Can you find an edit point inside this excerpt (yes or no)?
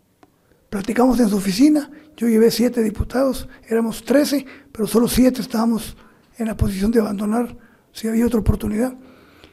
no